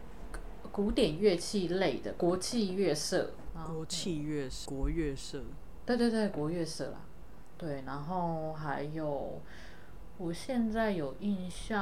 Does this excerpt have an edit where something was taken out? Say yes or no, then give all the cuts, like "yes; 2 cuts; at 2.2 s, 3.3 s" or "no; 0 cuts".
yes; 1 cut; at 4.7 s